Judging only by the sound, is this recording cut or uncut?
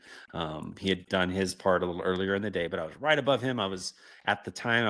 uncut